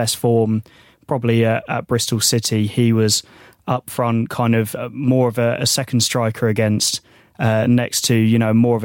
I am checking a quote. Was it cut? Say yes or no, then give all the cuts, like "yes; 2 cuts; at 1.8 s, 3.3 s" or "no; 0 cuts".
no; 0 cuts